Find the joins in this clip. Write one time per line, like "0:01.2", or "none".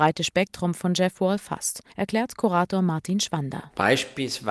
0:01.9